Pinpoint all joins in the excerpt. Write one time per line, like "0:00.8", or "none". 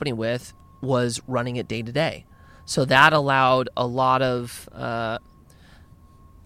none